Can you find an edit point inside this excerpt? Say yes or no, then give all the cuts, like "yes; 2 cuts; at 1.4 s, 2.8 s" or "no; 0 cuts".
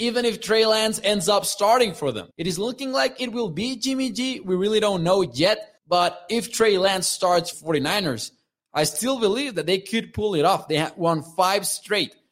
yes; 3 cuts; at 2.3 s, 5.8 s, 7.5 s